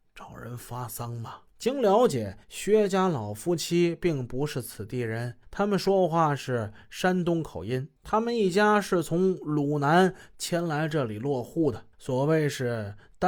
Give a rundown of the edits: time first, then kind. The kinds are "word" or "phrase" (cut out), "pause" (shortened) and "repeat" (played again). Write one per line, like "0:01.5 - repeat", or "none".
0:01.5 - pause
0:02.4 - pause
0:05.4 - pause
0:08.0 - pause
0:11.9 - pause